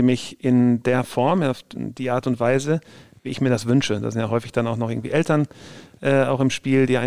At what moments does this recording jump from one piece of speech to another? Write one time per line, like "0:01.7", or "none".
none